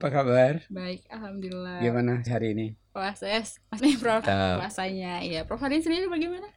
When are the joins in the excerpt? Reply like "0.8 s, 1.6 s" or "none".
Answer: 2.3 s, 3.8 s, 4.2 s